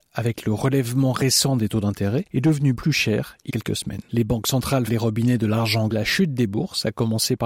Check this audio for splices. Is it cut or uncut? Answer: cut